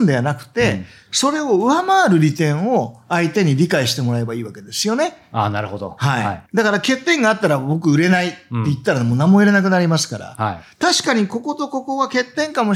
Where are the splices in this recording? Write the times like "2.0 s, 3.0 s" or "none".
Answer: 6.5 s